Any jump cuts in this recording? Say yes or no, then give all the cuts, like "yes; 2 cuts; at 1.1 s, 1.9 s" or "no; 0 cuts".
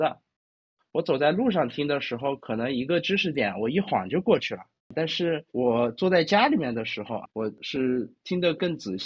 yes; 3 cuts; at 4.8 s, 5.5 s, 7.3 s